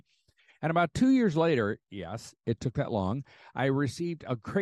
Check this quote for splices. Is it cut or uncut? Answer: uncut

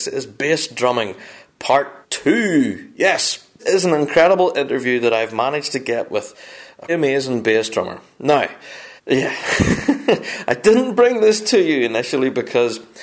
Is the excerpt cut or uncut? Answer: cut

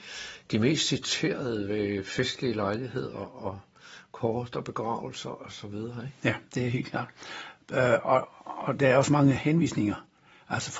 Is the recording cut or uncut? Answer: uncut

